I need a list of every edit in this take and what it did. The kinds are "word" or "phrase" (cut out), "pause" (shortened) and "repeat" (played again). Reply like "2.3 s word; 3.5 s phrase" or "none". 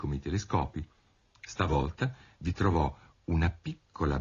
none

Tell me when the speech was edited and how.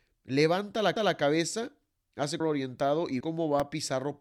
1.0 s repeat; 2.4 s word; 3.2 s word

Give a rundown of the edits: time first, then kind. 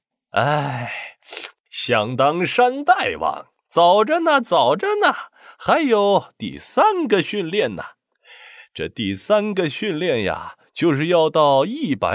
none

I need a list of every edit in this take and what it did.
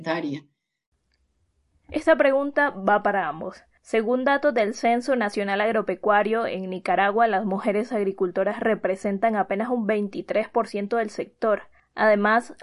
none

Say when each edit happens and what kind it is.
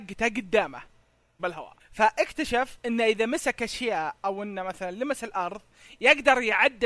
1.4 s phrase; 1.8 s pause

